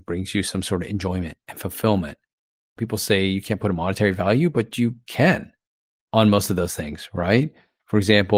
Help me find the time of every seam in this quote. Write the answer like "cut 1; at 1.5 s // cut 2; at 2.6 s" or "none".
none